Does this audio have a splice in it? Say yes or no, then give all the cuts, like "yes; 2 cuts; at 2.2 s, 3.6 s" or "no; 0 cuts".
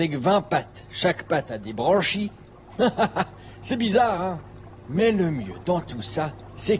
no; 0 cuts